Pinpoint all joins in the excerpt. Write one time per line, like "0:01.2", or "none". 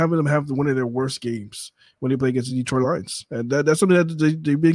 none